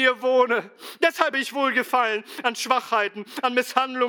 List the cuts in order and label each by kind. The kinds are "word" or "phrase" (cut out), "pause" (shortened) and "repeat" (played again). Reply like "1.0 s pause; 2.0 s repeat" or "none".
1.3 s word